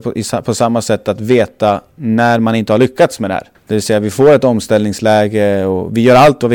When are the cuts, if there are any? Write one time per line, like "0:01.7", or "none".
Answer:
0:03.5